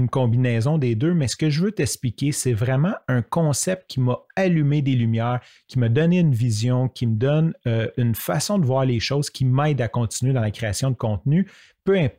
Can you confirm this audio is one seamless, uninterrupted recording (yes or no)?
yes